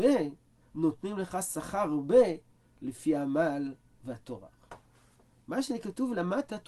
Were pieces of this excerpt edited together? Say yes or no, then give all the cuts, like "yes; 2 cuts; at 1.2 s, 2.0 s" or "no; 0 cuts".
no; 0 cuts